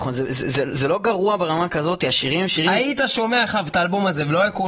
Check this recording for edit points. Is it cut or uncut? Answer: uncut